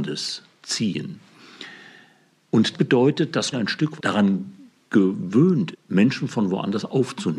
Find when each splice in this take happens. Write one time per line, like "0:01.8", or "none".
0:02.7
0:03.5
0:04.0
0:05.7